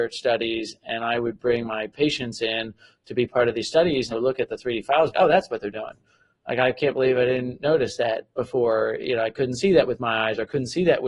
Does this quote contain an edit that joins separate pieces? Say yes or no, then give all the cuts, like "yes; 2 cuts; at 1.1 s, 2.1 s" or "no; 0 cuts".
yes; 2 cuts; at 4.1 s, 5.1 s